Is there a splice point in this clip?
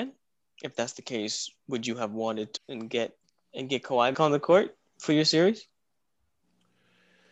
yes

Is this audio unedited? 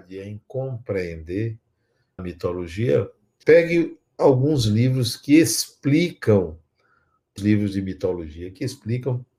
no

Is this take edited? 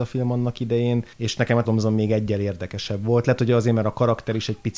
yes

